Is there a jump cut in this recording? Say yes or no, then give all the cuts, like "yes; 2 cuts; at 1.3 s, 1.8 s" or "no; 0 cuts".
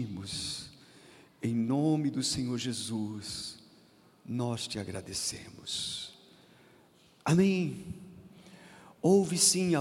no; 0 cuts